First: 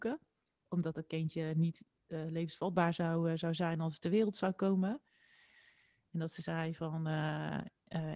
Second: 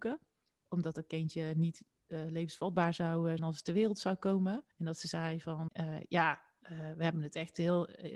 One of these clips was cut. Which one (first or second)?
second